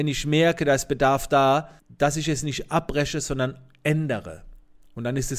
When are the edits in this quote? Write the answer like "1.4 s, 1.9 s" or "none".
1.8 s